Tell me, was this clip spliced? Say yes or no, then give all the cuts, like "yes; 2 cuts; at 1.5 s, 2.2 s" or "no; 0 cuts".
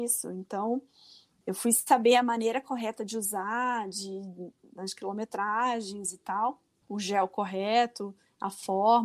no; 0 cuts